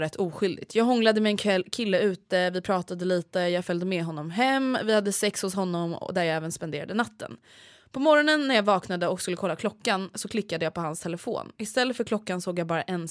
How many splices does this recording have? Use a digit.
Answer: 0